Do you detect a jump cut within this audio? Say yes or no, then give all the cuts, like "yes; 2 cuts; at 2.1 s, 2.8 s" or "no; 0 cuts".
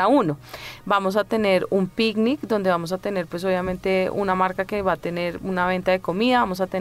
no; 0 cuts